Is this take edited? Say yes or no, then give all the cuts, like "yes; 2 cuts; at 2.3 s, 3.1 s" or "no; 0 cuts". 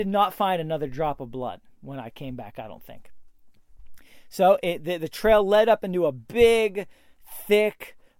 no; 0 cuts